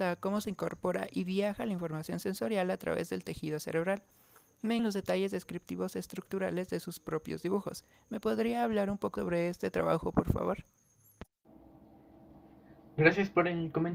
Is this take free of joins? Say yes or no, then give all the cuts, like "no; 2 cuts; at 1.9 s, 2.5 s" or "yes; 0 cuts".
no; 2 cuts; at 4.8 s, 9.1 s